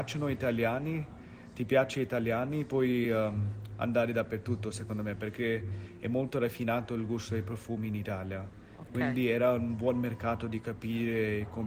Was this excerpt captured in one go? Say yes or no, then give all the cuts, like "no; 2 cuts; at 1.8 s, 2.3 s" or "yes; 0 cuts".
yes; 0 cuts